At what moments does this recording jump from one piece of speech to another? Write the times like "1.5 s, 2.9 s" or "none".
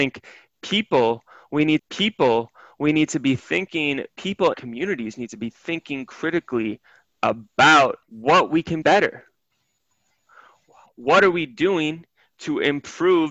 1.8 s, 4.5 s, 8.0 s, 8.8 s